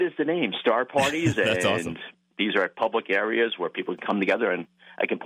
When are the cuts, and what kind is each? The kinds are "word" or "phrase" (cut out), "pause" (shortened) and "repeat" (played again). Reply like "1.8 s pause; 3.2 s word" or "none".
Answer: none